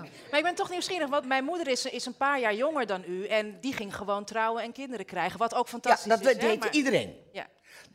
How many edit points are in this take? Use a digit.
1